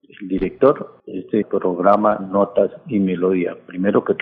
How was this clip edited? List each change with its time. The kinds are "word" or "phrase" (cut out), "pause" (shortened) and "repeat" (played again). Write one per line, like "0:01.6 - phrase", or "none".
0:01.0 - pause
0:01.4 - word